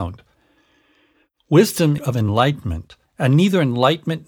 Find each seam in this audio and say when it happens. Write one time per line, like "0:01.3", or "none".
0:02.0
0:03.1